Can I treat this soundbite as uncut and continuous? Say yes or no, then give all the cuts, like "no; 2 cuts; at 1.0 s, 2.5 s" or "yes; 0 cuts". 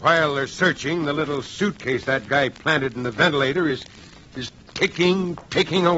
yes; 0 cuts